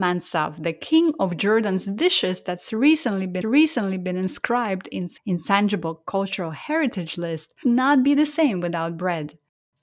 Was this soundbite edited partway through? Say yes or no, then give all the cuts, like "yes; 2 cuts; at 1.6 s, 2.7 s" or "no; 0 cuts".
yes; 3 cuts; at 3.4 s, 5.2 s, 7.6 s